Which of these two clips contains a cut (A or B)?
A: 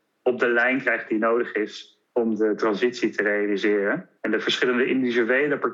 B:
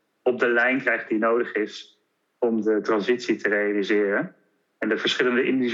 A